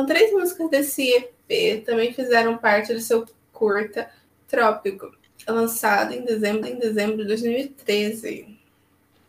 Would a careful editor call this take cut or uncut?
cut